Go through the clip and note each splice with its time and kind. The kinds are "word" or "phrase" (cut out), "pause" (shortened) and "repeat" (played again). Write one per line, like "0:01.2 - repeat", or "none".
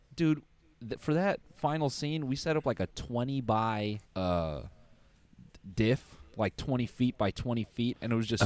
0:04.0 - pause